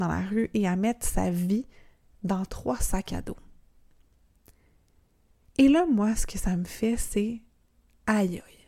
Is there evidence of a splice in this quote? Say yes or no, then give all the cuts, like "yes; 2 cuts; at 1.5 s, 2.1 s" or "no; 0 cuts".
no; 0 cuts